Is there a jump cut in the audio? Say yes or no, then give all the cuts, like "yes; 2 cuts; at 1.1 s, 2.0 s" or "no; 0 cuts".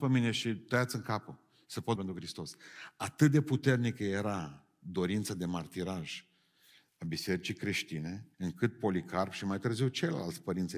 yes; 2 cuts; at 2.0 s, 8.3 s